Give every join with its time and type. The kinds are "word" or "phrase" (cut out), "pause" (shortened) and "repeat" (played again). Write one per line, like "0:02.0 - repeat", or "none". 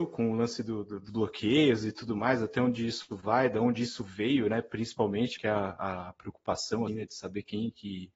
0:01.1 - word
0:05.4 - word
0:06.9 - word